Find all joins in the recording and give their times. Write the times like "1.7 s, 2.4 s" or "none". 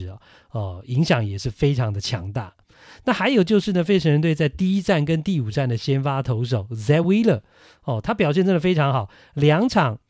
none